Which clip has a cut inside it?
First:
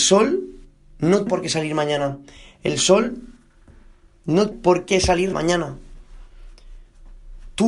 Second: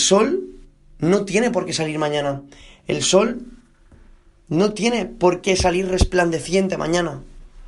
first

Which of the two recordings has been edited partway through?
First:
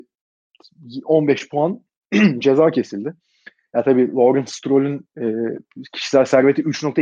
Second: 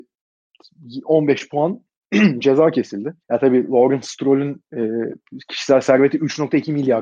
second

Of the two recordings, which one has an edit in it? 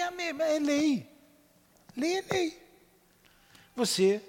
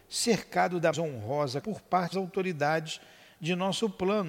second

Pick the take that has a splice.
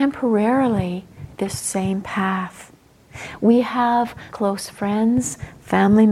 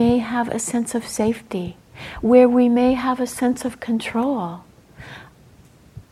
first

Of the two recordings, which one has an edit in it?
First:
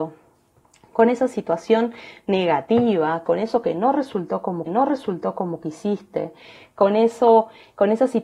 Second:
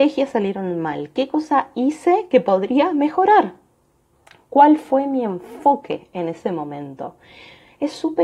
first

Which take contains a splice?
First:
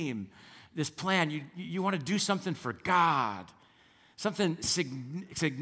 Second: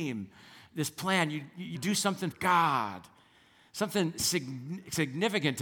second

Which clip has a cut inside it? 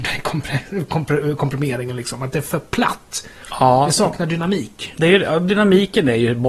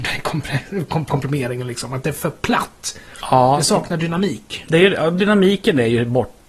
second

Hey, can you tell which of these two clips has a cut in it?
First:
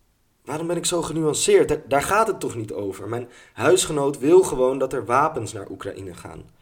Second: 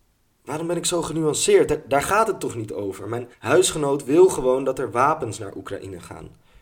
second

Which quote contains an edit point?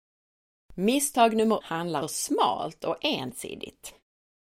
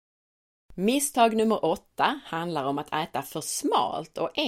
first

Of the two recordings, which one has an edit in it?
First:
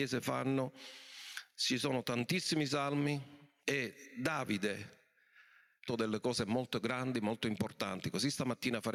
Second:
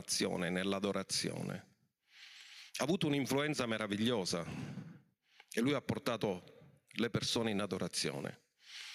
first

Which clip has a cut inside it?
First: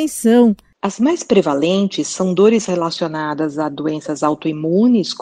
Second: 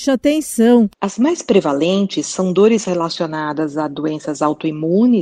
second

